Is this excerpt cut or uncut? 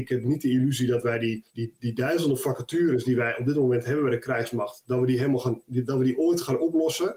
cut